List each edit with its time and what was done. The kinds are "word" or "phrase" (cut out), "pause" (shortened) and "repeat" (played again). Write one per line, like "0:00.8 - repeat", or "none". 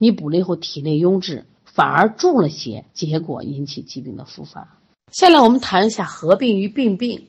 0:01.6 - pause
0:02.9 - pause
0:04.9 - pause